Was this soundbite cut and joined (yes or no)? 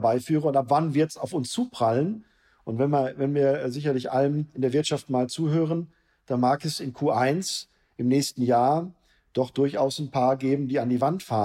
no